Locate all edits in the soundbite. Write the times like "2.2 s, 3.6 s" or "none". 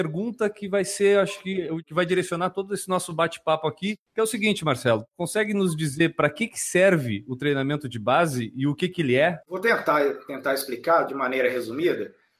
9.4 s

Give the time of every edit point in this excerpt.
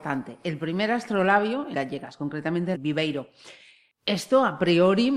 1.7 s, 2.7 s

